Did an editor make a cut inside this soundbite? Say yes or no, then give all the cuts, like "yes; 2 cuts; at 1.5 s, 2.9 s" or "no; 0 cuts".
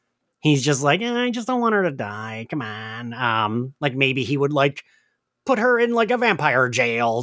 no; 0 cuts